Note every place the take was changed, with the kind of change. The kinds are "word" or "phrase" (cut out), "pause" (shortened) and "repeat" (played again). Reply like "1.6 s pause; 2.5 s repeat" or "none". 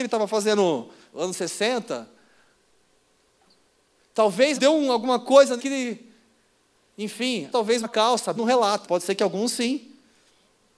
1.1 s word; 4.6 s word; 5.6 s word; 7.5 s word; 7.8 s word; 8.4 s word; 8.8 s word